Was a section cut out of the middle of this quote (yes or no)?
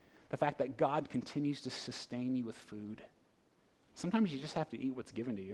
no